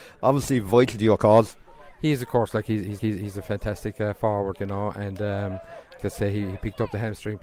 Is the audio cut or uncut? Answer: cut